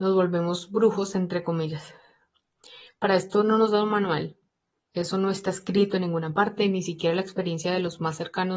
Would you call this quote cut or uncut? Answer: uncut